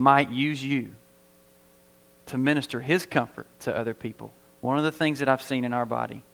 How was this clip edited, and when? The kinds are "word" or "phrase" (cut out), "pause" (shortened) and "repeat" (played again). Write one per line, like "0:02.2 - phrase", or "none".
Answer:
0:03.5 - pause
0:04.4 - pause

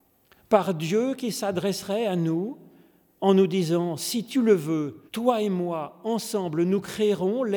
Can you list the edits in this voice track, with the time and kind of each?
0:05.1 - pause

